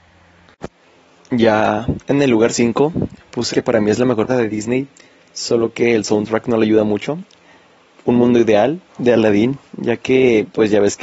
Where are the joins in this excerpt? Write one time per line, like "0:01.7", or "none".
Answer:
0:03.5
0:04.3
0:08.9